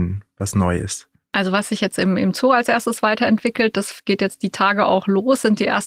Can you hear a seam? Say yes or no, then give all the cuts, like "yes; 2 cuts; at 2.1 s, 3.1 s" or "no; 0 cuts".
no; 0 cuts